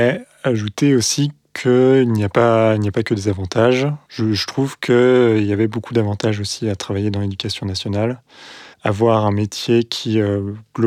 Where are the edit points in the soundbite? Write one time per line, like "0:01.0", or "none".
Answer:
0:04.0
0:08.7